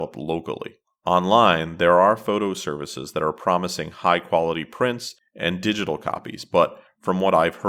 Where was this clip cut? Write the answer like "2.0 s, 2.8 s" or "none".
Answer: none